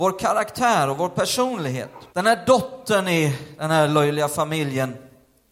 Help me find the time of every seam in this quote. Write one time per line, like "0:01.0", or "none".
0:02.1